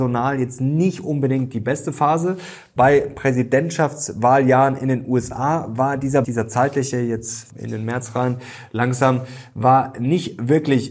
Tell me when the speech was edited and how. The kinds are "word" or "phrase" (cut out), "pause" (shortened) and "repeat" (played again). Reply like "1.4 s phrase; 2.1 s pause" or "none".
6.2 s word; 7.5 s word